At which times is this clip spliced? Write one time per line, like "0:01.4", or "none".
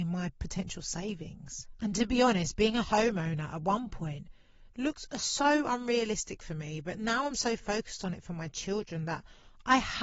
none